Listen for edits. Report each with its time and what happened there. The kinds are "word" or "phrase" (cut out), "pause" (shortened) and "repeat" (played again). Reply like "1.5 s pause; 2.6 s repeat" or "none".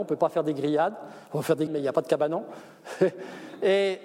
1.7 s word

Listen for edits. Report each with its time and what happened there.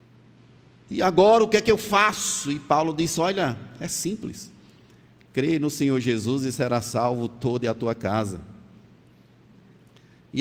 none

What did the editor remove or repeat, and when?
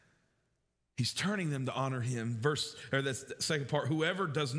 none

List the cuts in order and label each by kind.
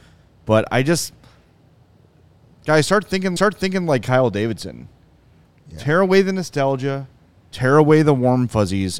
3.4 s repeat

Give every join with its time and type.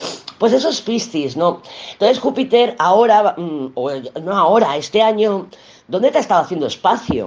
none

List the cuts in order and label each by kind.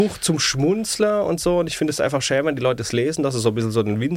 none

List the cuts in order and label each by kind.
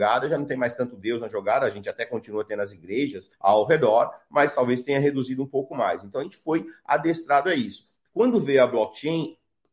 3.3 s pause

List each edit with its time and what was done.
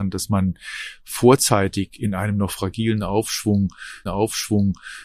4.1 s repeat

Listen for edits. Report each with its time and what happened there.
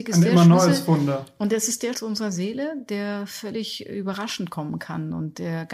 1.9 s word

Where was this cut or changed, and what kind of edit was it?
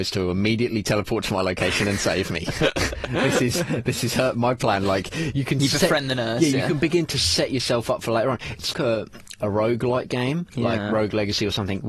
8.7 s word

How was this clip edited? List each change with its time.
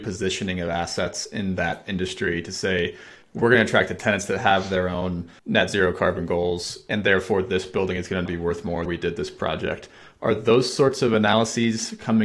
5.4 s pause; 8.3 s word; 8.9 s phrase

